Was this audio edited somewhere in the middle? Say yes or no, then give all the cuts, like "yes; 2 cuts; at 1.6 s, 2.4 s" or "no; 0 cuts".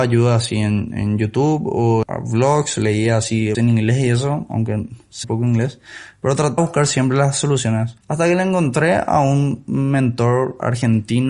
yes; 5 cuts; at 2.0 s, 3.5 s, 5.2 s, 6.6 s, 8.0 s